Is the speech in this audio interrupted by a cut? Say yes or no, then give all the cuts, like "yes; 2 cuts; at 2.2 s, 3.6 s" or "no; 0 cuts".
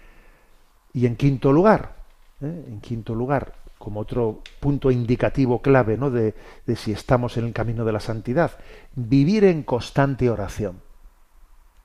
yes; 1 cut; at 3.7 s